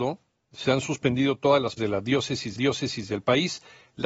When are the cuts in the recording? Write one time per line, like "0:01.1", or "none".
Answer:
0:01.8
0:02.6

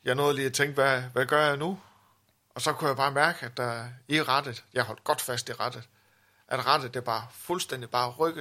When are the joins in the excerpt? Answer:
none

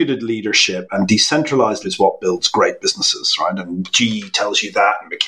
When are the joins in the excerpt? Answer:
0:01.8

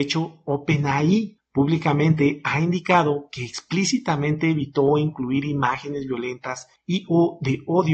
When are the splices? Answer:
none

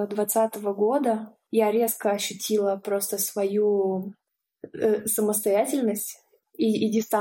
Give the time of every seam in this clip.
none

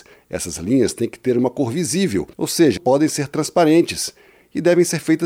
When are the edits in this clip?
0:02.3
0:02.8

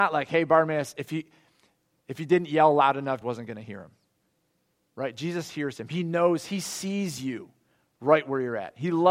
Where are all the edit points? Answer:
0:03.2

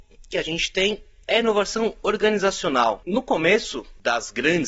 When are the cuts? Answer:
none

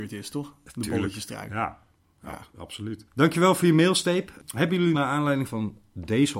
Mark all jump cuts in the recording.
0:03.1
0:04.9
0:05.5

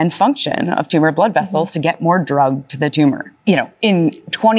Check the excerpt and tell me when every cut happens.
none

